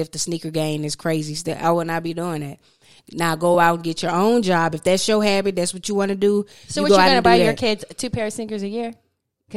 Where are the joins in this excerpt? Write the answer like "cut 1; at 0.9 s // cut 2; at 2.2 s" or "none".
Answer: none